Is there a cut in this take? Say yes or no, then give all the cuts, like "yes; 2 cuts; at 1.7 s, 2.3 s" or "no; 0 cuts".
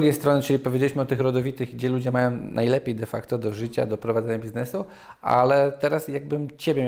no; 0 cuts